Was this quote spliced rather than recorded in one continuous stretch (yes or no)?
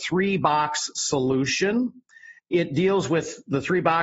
yes